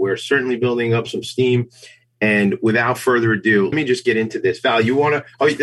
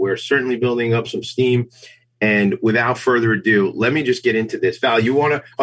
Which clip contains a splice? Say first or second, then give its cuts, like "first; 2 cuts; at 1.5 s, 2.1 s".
first; 1 cut; at 3.7 s